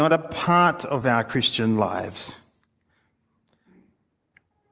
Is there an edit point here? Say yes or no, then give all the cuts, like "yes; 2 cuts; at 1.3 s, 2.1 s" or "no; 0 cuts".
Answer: no; 0 cuts